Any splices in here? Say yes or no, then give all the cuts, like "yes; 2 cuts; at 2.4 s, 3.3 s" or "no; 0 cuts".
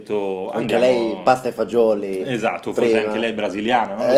no; 0 cuts